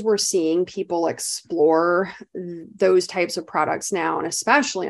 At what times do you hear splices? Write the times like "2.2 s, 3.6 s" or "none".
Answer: none